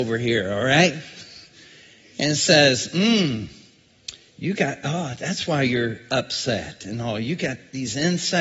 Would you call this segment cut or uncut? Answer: uncut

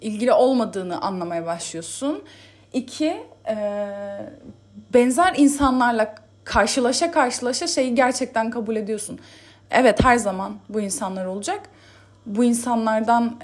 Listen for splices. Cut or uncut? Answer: uncut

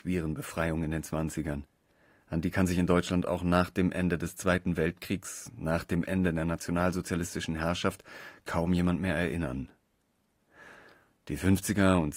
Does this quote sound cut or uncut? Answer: uncut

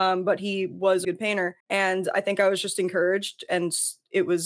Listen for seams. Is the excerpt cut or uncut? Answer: cut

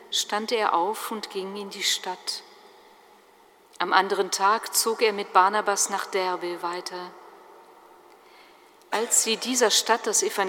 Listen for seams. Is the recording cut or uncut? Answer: uncut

